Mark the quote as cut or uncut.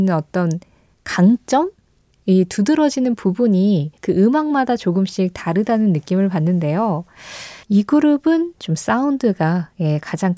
cut